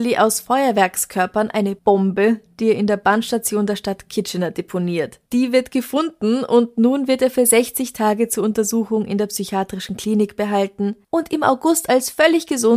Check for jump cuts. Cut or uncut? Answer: cut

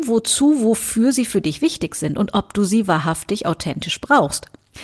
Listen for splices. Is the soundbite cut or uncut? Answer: uncut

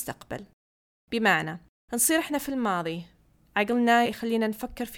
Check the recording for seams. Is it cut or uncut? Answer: cut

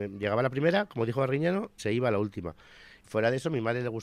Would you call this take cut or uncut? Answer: cut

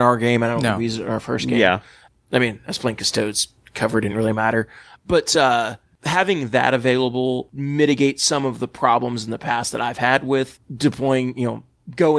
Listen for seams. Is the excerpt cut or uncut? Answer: uncut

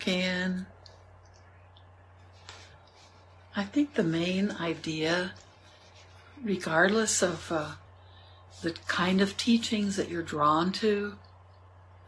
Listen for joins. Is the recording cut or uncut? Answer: uncut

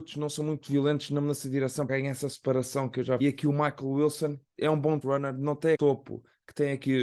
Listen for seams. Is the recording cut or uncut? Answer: cut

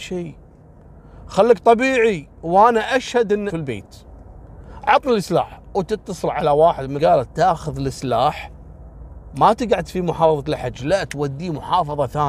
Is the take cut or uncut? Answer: cut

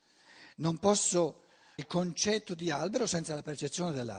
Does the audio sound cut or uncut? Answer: cut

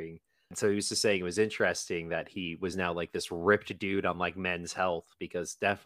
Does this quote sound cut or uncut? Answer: uncut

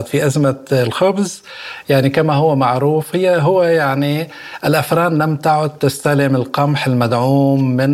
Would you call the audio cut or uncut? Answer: uncut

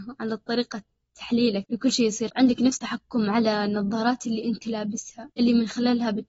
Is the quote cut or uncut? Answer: cut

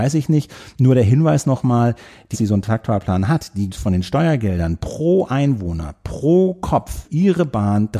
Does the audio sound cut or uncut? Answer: cut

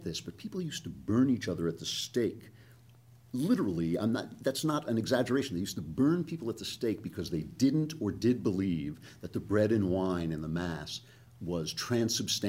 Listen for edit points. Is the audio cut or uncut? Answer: uncut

